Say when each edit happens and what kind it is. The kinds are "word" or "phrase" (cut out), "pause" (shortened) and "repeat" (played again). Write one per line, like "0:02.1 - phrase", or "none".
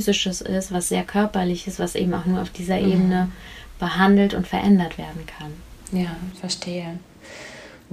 none